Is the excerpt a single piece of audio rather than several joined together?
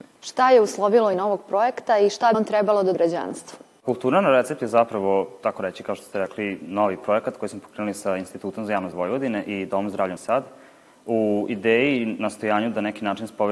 no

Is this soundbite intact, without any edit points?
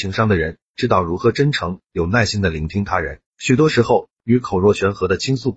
no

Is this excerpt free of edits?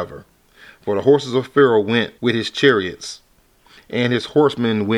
no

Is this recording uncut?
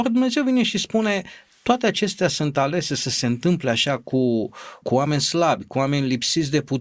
no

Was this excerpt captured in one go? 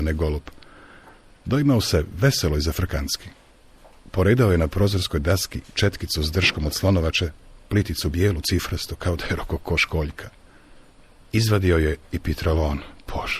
yes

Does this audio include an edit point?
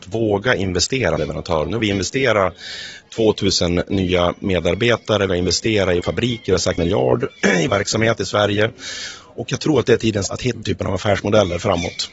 yes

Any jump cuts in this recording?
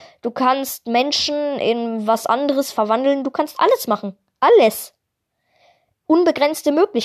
no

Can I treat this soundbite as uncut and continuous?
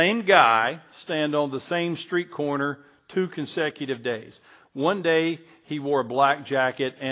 yes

